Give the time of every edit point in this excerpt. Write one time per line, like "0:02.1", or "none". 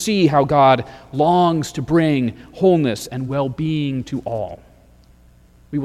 none